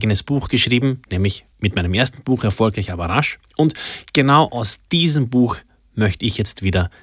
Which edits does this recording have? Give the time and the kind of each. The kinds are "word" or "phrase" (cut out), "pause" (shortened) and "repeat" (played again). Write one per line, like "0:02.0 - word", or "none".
0:01.5 - pause
0:03.5 - pause